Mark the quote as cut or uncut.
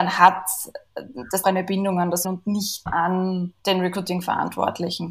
cut